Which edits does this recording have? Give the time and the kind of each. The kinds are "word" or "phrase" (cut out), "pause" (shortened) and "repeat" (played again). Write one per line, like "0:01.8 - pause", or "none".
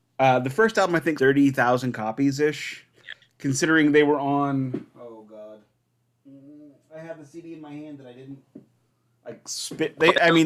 0:01.2 - word
0:02.9 - word